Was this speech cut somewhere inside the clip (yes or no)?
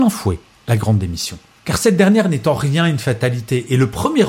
no